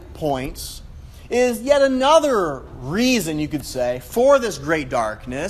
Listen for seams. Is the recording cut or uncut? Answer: uncut